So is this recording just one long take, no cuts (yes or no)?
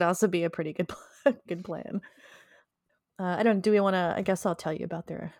no